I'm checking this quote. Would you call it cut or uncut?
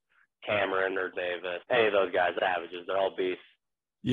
cut